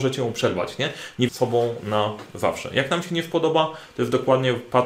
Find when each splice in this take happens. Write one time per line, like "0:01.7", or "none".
0:01.3

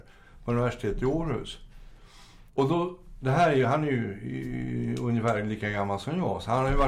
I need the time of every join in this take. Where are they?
0:02.5

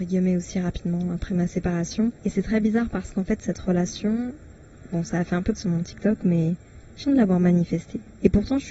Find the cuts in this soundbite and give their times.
0:02.2
0:05.6
0:07.0

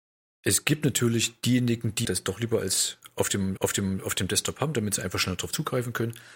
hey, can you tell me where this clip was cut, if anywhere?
0:02.0
0:03.6

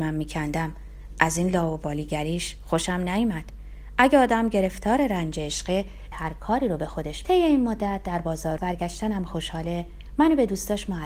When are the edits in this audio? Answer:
0:06.1
0:07.2
0:08.6

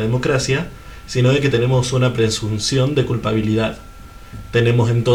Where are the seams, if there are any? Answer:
none

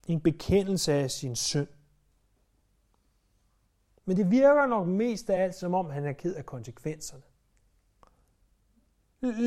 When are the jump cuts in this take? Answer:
none

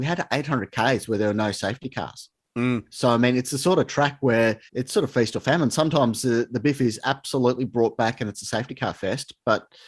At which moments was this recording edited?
0:04.7

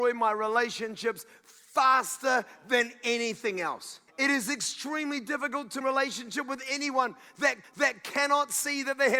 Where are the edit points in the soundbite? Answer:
0:04.1
0:05.8
0:07.6

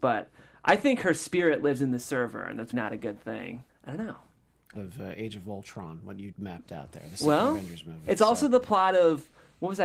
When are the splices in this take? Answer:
0:02.7
0:03.7
0:04.8
0:06.3

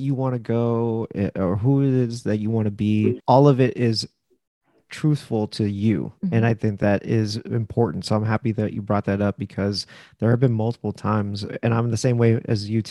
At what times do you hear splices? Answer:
0:06.2

